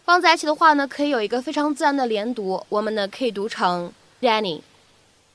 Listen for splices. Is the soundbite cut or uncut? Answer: cut